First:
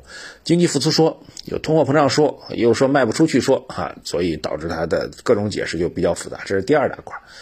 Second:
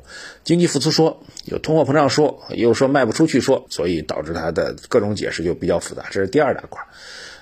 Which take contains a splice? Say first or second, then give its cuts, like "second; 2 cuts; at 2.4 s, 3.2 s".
second; 1 cut; at 3.7 s